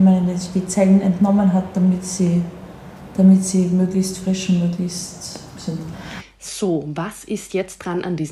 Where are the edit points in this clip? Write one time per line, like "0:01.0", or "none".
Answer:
none